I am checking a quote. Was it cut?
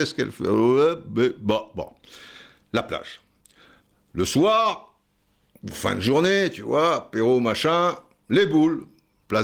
no; 0 cuts

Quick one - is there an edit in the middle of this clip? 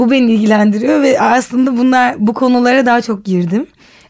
no; 0 cuts

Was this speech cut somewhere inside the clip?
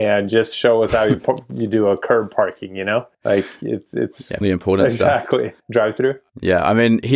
yes; 3 cuts; at 3.1 s, 4.4 s, 5.6 s

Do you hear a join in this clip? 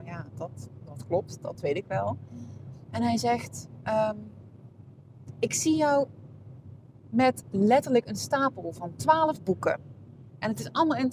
no; 0 cuts

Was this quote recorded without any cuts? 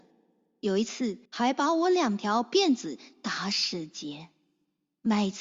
no; 1 cut; at 1.3 s

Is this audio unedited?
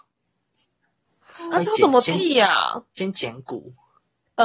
yes; 0 cuts

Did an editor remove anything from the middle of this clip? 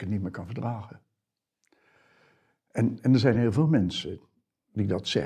no; 0 cuts

